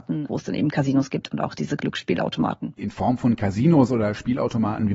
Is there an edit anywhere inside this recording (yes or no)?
no